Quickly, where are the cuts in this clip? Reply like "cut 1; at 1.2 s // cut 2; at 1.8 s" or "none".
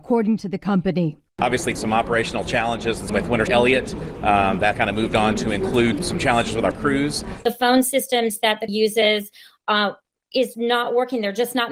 cut 1; at 1.8 s // cut 2; at 3.1 s // cut 3; at 3.5 s // cut 4; at 4.7 s // cut 5; at 6.0 s // cut 6; at 6.7 s // cut 7; at 8.7 s // cut 8; at 10.5 s